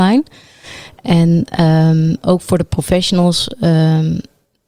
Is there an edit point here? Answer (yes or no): no